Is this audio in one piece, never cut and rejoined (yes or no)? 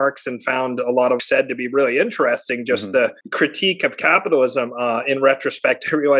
no